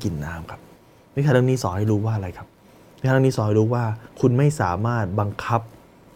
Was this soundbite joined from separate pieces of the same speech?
yes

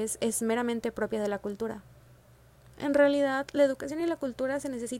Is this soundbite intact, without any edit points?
yes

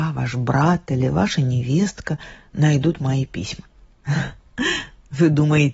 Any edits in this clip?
no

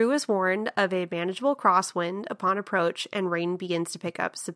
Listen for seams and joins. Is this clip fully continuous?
yes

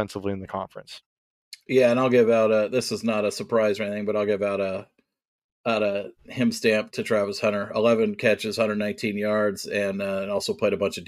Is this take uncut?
no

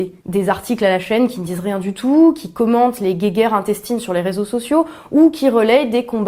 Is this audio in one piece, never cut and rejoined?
yes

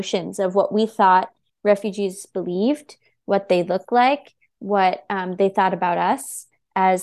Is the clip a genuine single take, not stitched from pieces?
yes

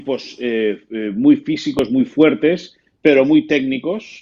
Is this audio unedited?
yes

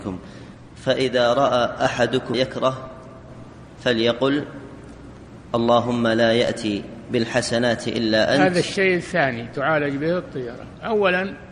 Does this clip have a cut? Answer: yes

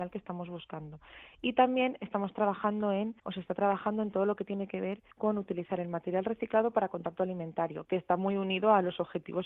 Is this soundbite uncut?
no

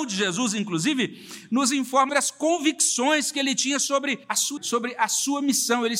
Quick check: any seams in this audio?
yes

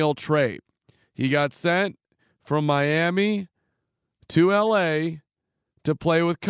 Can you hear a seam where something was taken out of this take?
no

